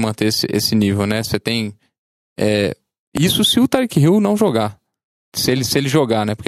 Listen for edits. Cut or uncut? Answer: uncut